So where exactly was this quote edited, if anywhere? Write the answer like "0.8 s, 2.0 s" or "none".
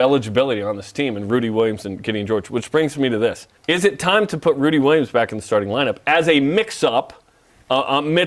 3.6 s